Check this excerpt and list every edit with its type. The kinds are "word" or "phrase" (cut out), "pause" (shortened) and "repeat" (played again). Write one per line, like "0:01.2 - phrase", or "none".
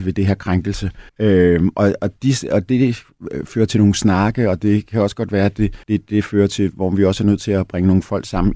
0:01.1 - pause
0:05.8 - pause

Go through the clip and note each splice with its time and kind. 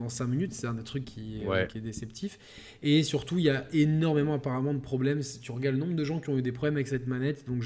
0:01.0 - word

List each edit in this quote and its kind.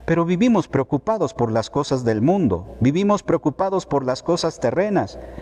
none

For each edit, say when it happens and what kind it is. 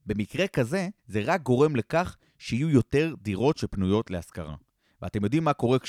0:01.0 - pause

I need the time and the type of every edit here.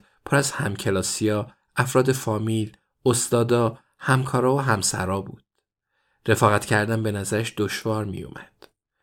none

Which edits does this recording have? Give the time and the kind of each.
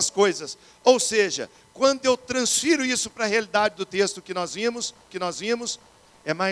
0:05.1 - repeat

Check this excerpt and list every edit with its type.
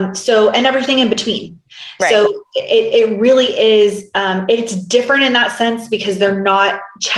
none

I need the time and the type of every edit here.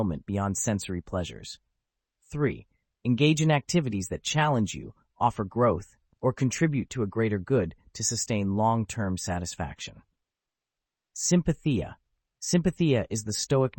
none

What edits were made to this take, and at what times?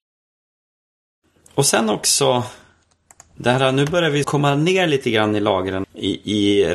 0:04.2 - word
0:05.8 - word

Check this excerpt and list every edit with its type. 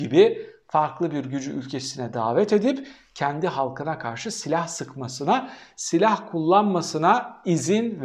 none

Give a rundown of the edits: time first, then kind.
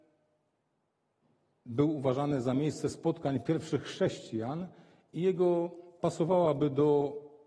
0:06.0 - word

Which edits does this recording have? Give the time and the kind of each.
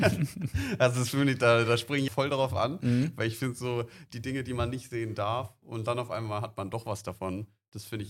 0:02.1 - word

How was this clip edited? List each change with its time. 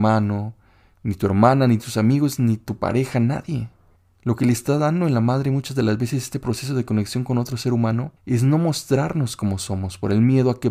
0:04.0 - pause
0:08.2 - pause

